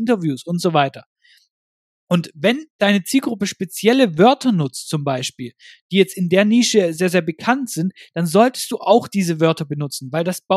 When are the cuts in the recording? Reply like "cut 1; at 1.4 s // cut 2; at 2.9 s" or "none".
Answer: none